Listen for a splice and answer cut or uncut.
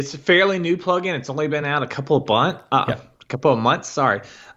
uncut